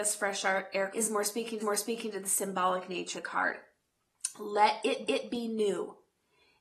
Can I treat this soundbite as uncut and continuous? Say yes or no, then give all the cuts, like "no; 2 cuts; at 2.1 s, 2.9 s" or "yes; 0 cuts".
no; 4 cuts; at 0.9 s, 1.6 s, 3.1 s, 5.1 s